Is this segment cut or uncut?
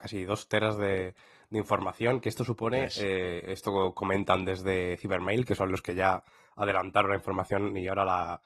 uncut